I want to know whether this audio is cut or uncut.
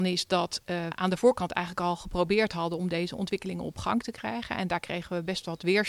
cut